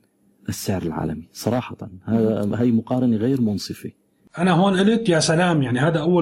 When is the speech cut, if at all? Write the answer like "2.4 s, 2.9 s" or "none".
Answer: none